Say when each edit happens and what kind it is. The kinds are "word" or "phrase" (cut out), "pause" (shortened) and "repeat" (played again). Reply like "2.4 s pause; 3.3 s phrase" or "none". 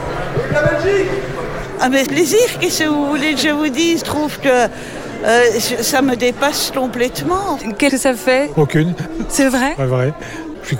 2.1 s phrase; 4.0 s word; 5.8 s word; 7.9 s phrase